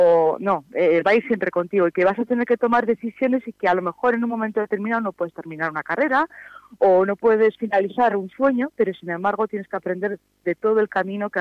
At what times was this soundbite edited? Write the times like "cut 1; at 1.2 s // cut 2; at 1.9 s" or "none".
none